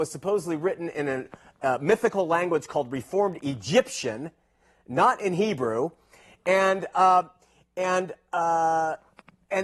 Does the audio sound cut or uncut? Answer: uncut